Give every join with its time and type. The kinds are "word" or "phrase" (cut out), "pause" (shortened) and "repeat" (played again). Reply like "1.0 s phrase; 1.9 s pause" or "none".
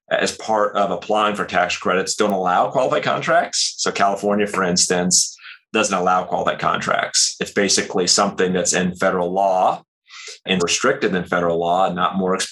5.6 s pause; 10.6 s phrase